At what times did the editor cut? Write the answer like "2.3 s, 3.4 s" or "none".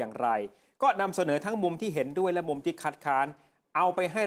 none